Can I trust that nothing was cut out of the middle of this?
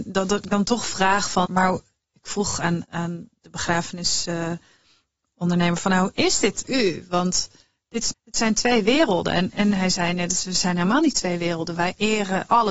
no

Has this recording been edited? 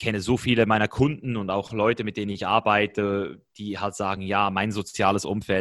no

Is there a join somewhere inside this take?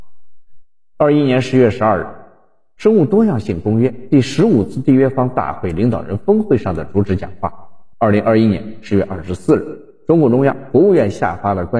yes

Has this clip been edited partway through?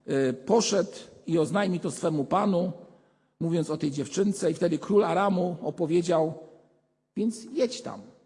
no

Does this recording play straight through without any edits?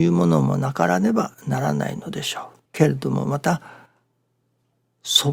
no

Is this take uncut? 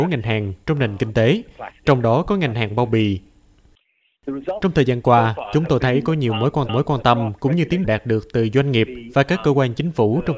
no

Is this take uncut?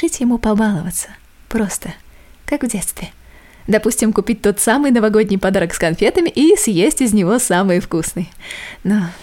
yes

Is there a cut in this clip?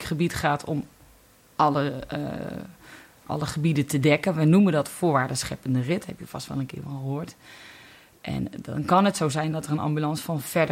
no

